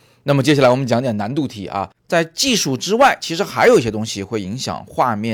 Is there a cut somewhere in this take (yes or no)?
yes